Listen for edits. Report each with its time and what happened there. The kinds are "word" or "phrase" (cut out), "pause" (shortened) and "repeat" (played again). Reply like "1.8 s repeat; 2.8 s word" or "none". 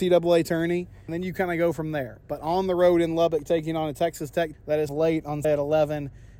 1.1 s word; 4.5 s word; 4.9 s phrase; 5.4 s word

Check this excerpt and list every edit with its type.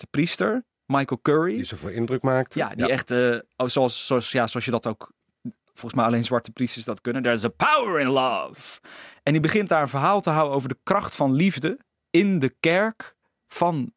none

